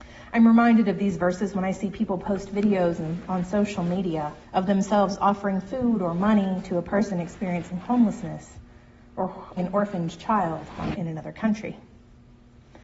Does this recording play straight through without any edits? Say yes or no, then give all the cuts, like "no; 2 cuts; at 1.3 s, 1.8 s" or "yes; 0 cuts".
no; 3 cuts; at 4.4 s, 9.6 s, 10.9 s